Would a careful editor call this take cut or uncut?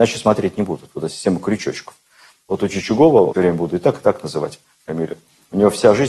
cut